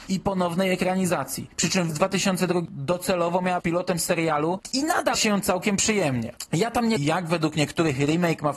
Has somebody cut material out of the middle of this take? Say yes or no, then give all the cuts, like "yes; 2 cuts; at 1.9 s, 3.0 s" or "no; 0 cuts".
yes; 5 cuts; at 1.9 s, 2.7 s, 3.6 s, 5.1 s, 7.0 s